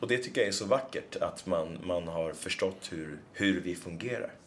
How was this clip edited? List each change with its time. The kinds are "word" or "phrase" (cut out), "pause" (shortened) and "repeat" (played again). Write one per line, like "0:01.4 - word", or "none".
0:03.3 - pause